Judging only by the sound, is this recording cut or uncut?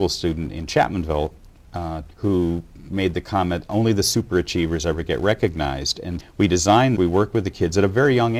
cut